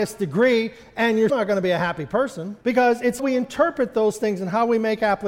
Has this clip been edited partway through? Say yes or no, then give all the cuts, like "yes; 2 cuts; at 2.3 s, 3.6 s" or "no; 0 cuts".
yes; 3 cuts; at 1.3 s, 2.6 s, 3.2 s